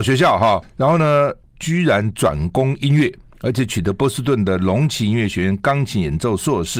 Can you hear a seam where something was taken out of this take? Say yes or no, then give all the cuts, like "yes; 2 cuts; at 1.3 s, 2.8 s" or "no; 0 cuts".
no; 0 cuts